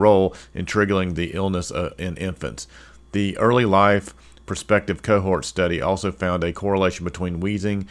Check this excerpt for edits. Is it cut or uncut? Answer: uncut